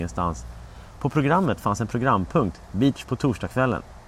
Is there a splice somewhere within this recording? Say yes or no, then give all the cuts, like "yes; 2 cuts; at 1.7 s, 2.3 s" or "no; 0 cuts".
yes; 1 cut; at 3.0 s